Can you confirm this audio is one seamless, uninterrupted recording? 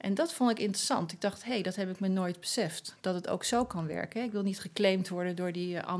yes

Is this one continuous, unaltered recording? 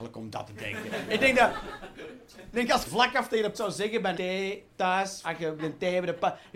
no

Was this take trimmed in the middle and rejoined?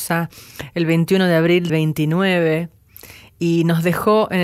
yes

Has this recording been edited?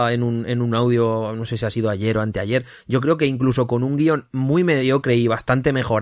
no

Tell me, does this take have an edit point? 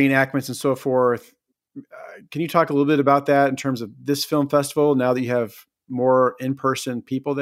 no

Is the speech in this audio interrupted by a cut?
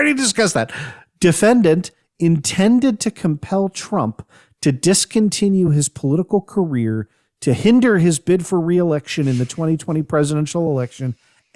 no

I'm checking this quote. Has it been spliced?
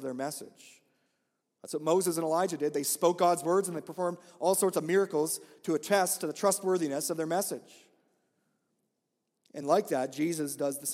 no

